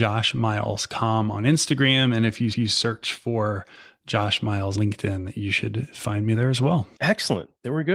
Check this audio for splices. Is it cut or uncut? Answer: cut